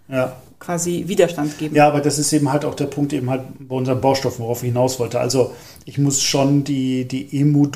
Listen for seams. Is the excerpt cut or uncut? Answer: uncut